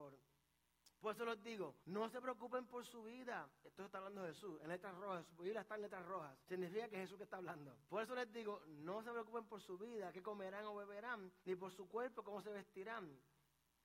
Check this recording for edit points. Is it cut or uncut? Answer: cut